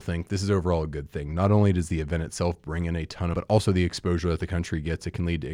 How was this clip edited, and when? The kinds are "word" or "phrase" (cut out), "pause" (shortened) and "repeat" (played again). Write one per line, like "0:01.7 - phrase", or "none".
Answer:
0:03.3 - phrase